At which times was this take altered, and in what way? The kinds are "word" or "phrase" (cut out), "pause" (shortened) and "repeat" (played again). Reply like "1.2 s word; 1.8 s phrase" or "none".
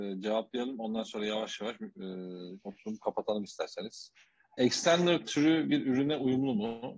none